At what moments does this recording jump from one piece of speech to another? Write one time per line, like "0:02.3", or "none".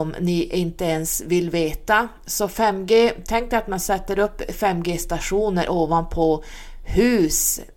none